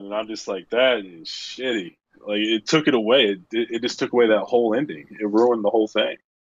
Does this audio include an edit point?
no; 0 cuts

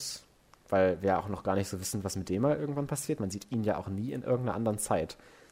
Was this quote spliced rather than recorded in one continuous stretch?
no; 0 cuts

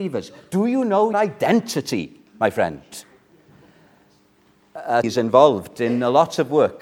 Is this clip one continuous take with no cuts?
no; 2 cuts; at 1.1 s, 5.0 s

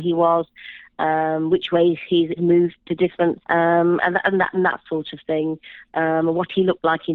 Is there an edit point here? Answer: yes; 2 cuts; at 2.4 s, 3.4 s

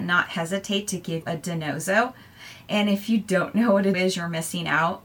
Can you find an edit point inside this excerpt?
yes; 2 cuts; at 1.2 s, 3.9 s

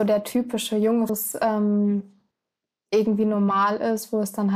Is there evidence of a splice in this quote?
yes; 1 cut; at 1.1 s

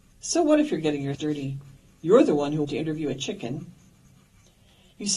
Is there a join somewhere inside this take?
yes; 2 cuts; at 1.1 s, 2.6 s

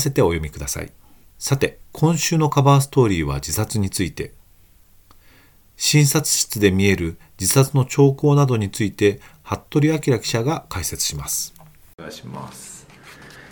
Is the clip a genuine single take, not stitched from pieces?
no; 2 cuts; at 1.2 s, 1.8 s

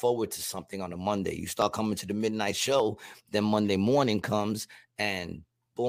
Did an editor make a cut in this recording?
no; 0 cuts

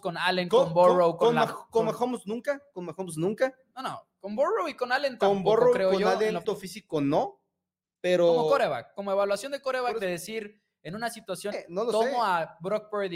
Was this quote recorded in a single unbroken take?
no; 2 cuts; at 6.4 s, 11.5 s

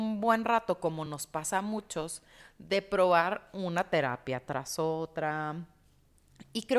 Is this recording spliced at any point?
no; 0 cuts

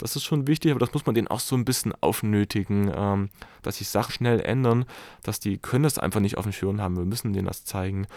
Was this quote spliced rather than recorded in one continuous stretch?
yes; 1 cut; at 4.1 s

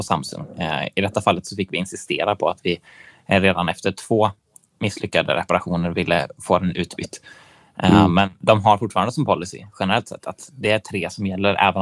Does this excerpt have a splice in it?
no; 0 cuts

